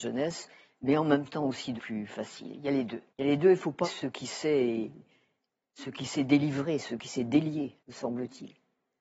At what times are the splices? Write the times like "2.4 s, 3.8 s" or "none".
1.8 s, 3.1 s, 3.8 s, 7.8 s